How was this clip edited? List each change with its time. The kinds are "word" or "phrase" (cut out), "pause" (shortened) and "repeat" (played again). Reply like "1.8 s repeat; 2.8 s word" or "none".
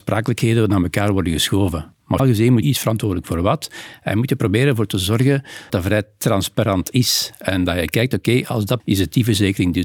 2.2 s word; 2.6 s phrase; 5.7 s word; 8.8 s phrase